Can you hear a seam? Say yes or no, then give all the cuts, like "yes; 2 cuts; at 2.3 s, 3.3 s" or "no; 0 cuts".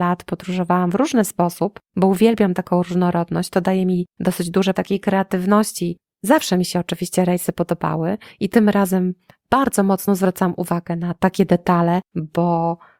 yes; 1 cut; at 4.7 s